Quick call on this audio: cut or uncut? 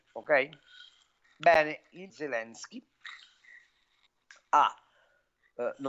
cut